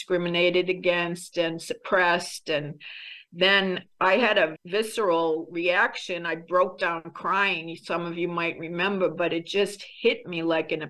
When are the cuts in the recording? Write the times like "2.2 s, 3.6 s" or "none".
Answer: 4.6 s